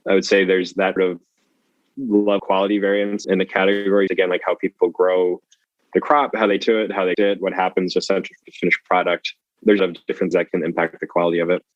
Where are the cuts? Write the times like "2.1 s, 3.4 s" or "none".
1.0 s, 2.4 s, 3.2 s, 4.1 s, 6.6 s, 7.1 s, 8.4 s, 9.8 s, 10.3 s